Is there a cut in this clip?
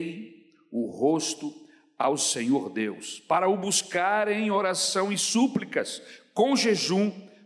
no; 0 cuts

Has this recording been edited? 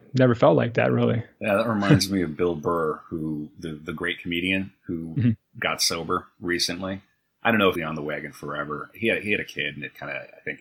yes; 1 cut; at 7.7 s

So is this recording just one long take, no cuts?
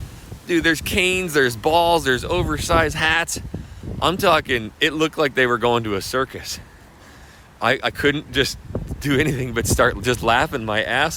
no; 1 cut; at 4.7 s

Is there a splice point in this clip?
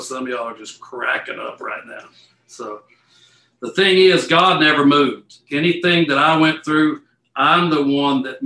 no; 0 cuts

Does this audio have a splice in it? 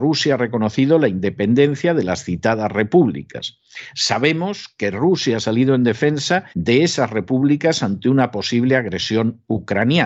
yes; 1 cut; at 6.5 s

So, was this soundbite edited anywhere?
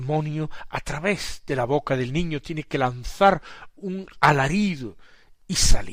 no; 0 cuts

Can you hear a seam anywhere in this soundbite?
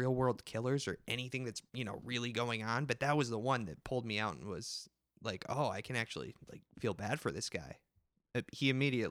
yes; 1 cut; at 1.7 s

